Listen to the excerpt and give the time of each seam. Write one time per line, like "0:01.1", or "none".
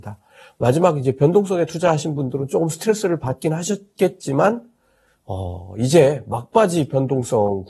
none

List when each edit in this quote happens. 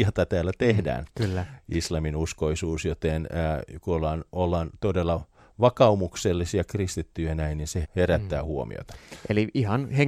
0:07.8

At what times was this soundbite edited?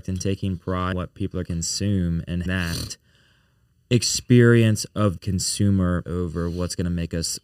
0:00.9
0:01.5
0:02.5
0:05.2
0:06.0

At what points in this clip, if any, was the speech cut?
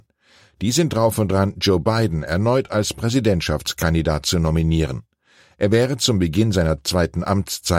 none

